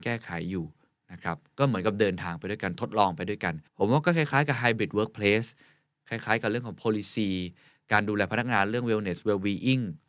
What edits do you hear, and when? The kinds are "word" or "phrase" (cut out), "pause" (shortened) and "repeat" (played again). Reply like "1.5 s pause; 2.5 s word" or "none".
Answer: 3.7 s pause